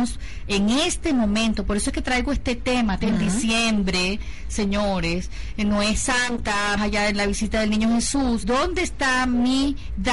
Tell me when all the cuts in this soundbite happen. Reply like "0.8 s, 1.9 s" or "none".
3.0 s, 6.8 s, 8.4 s